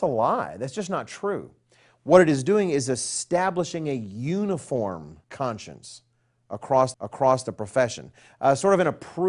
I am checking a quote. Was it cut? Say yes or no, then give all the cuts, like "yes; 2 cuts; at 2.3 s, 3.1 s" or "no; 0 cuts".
yes; 2 cuts; at 5.2 s, 6.9 s